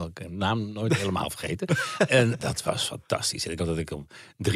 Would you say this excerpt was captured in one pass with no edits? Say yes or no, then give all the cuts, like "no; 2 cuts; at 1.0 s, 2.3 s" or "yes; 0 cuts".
no; 2 cuts; at 2.4 s, 3.6 s